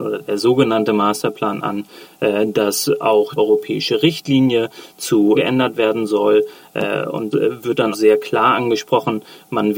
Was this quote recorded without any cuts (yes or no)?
no